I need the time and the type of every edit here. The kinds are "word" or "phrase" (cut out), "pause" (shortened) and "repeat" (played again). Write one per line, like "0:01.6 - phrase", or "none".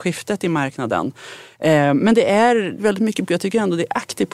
0:02.8 - phrase
0:03.3 - word